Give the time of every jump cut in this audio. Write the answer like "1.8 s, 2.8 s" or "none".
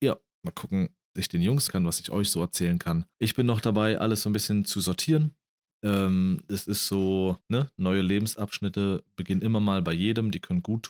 1.2 s, 1.7 s, 3.1 s, 7.4 s